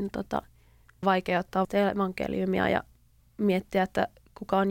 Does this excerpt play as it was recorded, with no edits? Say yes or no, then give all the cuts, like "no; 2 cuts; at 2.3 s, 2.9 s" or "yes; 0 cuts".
no; 3 cuts; at 1.0 s, 1.6 s, 3.2 s